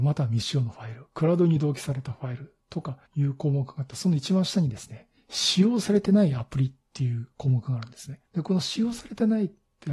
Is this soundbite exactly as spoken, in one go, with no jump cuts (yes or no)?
no